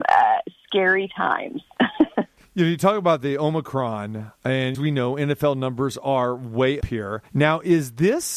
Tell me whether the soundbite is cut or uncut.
cut